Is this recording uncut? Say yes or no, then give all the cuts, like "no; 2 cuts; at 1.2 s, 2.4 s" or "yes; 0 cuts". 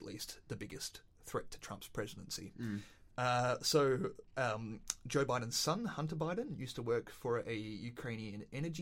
yes; 0 cuts